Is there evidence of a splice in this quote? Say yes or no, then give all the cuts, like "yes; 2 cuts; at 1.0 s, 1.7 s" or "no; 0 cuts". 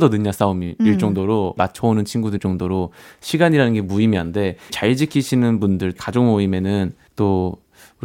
yes; 5 cuts; at 1.6 s, 2.4 s, 4.7 s, 6.0 s, 7.1 s